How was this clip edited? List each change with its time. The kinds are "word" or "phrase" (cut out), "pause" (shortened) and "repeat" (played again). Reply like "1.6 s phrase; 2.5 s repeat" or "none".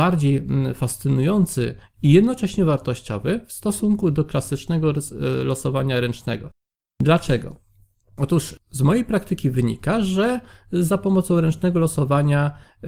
8.6 s pause